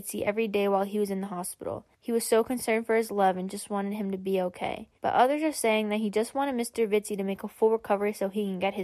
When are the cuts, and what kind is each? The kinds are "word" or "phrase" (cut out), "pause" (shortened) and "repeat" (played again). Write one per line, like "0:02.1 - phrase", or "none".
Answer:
0:01.9 - pause
0:05.0 - pause

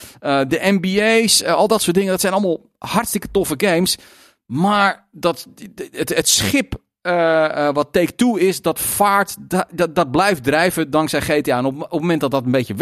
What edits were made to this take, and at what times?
none

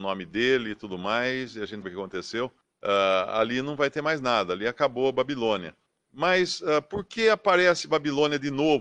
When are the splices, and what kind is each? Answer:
0:01.8 - word
0:02.6 - pause
0:05.9 - pause

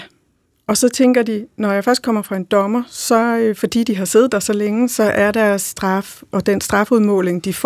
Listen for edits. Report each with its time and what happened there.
none

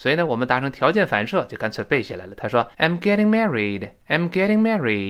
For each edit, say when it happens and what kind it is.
0:02.7 - pause
0:04.0 - pause

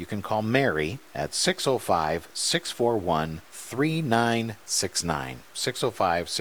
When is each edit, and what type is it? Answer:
0:03.4 - pause

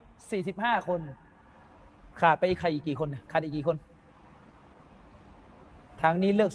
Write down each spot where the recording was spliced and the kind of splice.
0:02.1 - pause
0:03.2 - pause

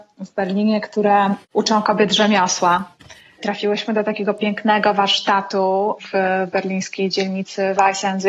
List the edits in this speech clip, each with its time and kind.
none

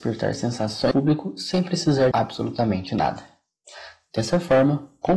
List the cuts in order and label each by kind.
0:00.9 - word
0:02.1 - word

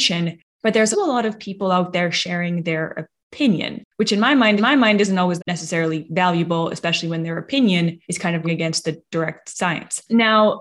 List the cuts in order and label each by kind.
0:00.9 - word
0:03.9 - pause
0:04.6 - repeat
0:05.4 - word
0:08.0 - pause
0:08.4 - word

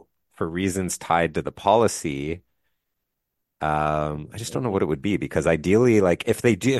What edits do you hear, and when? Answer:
none

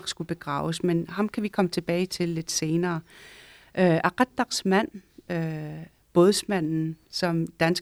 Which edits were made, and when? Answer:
none

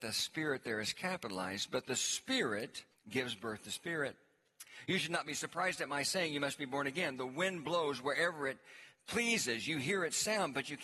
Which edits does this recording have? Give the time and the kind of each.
0:02.9 - pause

